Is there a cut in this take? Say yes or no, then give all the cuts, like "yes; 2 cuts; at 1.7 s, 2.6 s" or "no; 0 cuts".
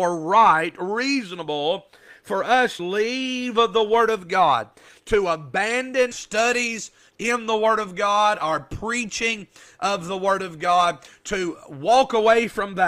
yes; 2 cuts; at 2.8 s, 6.1 s